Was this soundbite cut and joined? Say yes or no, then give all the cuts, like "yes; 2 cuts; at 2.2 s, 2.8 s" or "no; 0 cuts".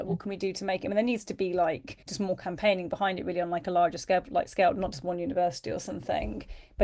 yes; 1 cut; at 2.0 s